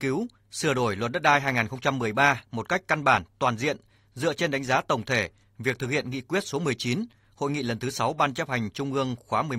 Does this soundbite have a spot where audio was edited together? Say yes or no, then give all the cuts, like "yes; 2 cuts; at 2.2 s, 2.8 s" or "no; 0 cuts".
no; 0 cuts